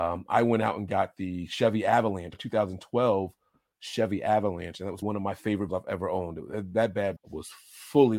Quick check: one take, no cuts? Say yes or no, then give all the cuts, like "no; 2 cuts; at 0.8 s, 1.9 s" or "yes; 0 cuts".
no; 4 cuts; at 2.3 s, 5.0 s, 5.7 s, 7.2 s